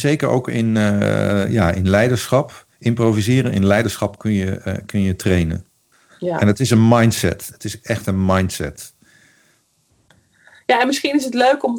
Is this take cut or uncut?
cut